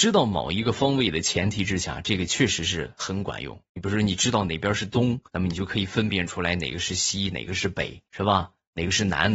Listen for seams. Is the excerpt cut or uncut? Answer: cut